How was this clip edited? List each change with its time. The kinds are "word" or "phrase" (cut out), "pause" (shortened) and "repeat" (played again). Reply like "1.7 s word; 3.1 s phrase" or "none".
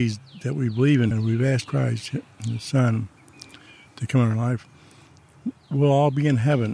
1.1 s word; 1.6 s word